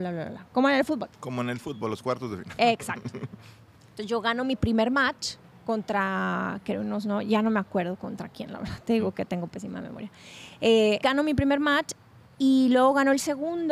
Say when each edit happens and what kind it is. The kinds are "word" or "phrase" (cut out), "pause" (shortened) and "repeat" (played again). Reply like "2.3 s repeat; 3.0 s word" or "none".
5.4 s pause; 11.0 s word